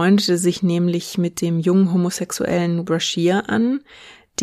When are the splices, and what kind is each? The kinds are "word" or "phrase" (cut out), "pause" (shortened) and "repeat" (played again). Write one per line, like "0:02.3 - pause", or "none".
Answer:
0:02.8 - word